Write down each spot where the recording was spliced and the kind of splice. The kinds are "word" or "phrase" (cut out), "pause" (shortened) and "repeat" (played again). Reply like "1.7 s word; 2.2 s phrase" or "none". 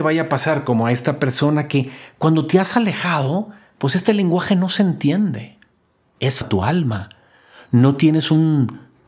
6.4 s word